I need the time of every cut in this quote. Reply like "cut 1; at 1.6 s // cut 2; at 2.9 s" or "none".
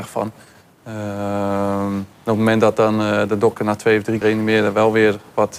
cut 1; at 2.1 s // cut 2; at 4.2 s